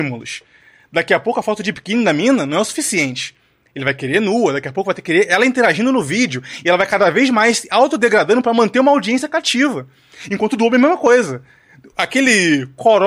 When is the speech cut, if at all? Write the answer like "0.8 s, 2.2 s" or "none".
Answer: none